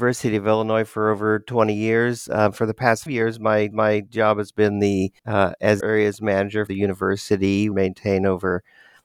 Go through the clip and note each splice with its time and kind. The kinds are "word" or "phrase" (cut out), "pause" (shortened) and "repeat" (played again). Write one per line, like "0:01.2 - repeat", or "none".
0:03.1 - word
0:03.7 - repeat
0:05.2 - pause
0:05.8 - phrase
0:06.7 - word
0:07.7 - phrase